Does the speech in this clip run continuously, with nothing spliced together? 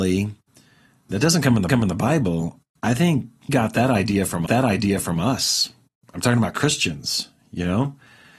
no; 3 cuts; at 1.7 s, 3.5 s, 4.5 s

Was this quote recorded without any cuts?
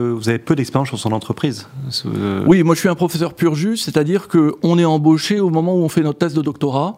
yes; 0 cuts

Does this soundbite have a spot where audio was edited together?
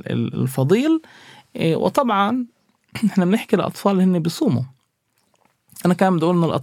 no; 0 cuts

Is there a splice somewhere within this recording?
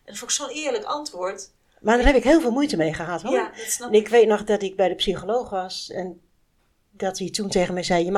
no; 0 cuts

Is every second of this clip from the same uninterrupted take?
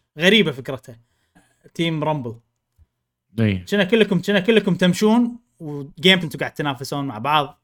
no; 3 cuts; at 1.4 s, 4.2 s, 6.2 s

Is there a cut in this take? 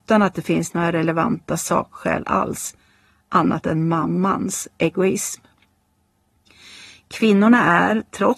no; 0 cuts

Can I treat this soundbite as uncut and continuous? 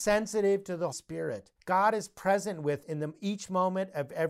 no; 3 cuts; at 0.9 s, 1.6 s, 2.8 s

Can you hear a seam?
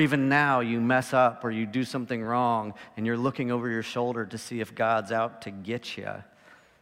no; 0 cuts

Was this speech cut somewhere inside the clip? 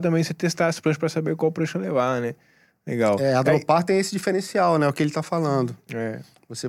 no; 0 cuts

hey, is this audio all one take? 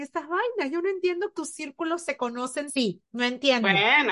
no; 2 cuts; at 1.3 s, 2.7 s

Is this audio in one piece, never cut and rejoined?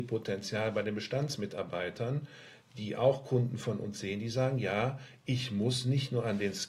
yes; 0 cuts

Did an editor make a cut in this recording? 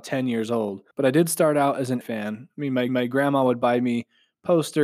yes; 3 cuts; at 0.9 s, 2.0 s, 2.9 s

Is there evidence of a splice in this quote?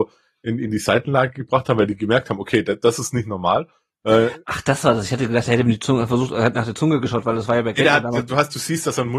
no; 0 cuts

